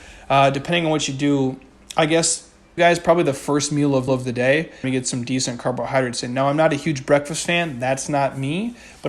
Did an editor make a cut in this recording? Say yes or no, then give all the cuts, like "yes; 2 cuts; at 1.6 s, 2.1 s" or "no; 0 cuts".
yes; 3 cuts; at 2.8 s, 4.1 s, 4.8 s